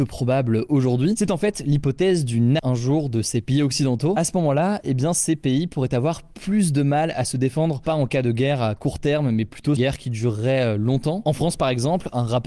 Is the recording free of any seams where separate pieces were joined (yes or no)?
no